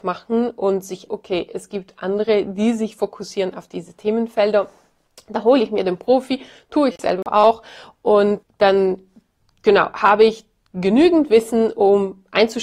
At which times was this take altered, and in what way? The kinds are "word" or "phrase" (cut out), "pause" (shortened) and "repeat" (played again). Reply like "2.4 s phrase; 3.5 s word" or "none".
1.1 s word; 8.4 s word